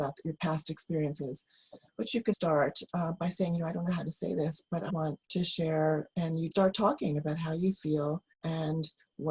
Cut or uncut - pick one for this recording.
cut